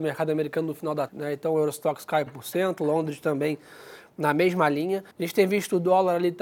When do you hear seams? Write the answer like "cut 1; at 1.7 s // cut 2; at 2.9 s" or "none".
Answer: cut 1; at 1.1 s // cut 2; at 2.3 s // cut 3; at 5.1 s